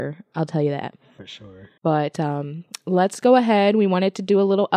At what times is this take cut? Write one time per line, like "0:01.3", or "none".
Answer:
0:01.8